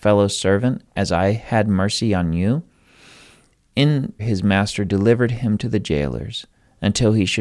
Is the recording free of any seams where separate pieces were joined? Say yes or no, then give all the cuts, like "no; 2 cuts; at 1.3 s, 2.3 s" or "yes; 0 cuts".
no; 1 cut; at 4.2 s